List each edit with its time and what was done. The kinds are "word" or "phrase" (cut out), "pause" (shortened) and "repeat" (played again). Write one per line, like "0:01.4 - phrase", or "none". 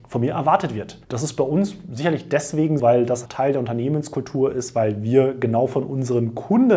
0:01.0 - pause
0:02.8 - word
0:03.3 - word

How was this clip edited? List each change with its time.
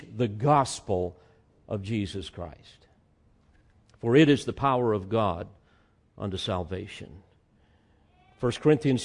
none

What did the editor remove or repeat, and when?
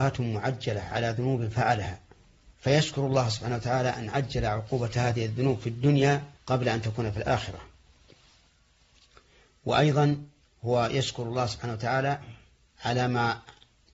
0:02.5 - pause
0:06.4 - pause
0:10.4 - pause

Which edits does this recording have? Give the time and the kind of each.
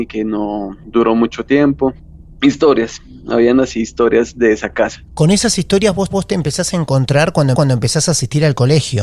0:05.0 - pause
0:06.1 - repeat
0:07.5 - repeat

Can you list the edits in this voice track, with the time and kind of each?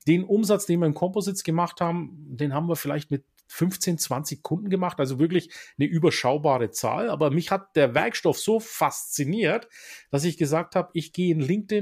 none

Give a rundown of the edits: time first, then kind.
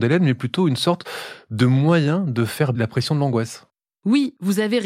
0:02.7 - word

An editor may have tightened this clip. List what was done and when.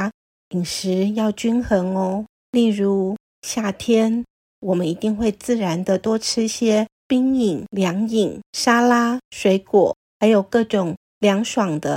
0:02.3 - pause
0:10.1 - pause

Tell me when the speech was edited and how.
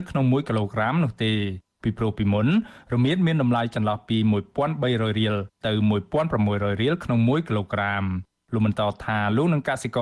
none

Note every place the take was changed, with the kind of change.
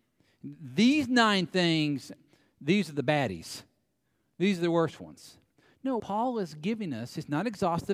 0:06.0 - word

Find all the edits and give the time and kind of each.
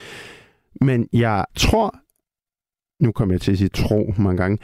0:01.5 - pause

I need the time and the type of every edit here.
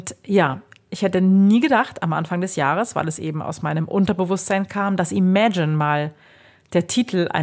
none

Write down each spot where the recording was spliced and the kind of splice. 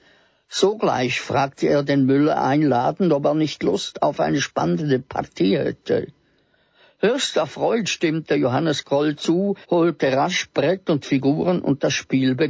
0:09.6 - pause

